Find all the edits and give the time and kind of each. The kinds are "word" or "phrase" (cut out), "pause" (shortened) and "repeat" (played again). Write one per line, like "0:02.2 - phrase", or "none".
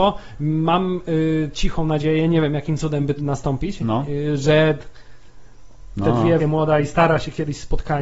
0:03.2 - word
0:06.4 - word

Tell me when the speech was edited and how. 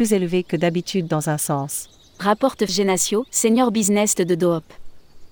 0:02.7 - word
0:03.3 - pause
0:04.2 - phrase

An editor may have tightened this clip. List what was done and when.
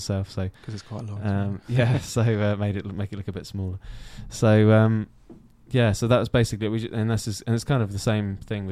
none

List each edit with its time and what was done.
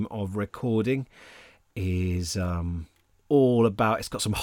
none

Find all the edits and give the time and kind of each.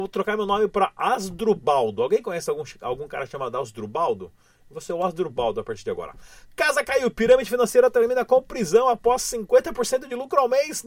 none

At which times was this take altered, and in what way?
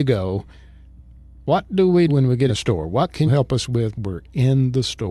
0:02.1 - word
0:02.5 - word
0:03.3 - word
0:03.9 - word

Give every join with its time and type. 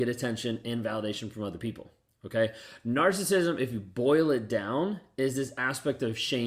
none

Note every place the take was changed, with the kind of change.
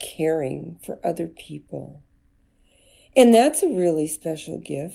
none

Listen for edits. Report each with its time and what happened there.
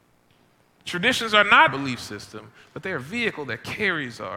0:01.7 - word

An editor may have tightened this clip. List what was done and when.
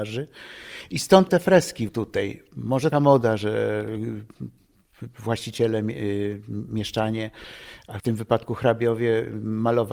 0:01.3 - word
0:01.9 - word
0:02.9 - phrase
0:08.0 - word

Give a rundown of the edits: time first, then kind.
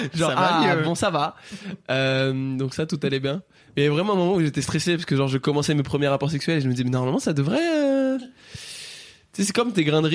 none

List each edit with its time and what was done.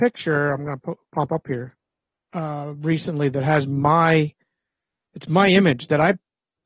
0:01.0 - pause

